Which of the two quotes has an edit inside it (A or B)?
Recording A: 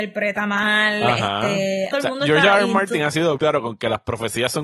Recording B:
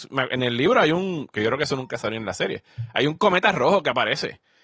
A